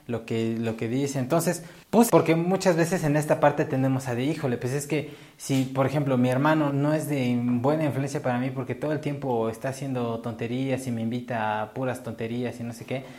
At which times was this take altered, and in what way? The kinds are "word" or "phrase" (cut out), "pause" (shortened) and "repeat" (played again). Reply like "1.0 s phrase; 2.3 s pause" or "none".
2.1 s word; 6.7 s word